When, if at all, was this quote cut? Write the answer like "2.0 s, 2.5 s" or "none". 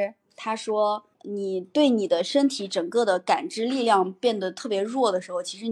1.1 s